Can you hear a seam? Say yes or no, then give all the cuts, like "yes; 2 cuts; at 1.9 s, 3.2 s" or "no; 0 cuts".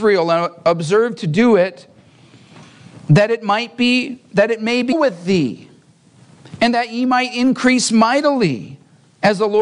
yes; 1 cut; at 4.9 s